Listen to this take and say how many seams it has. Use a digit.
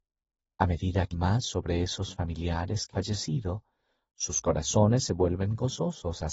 2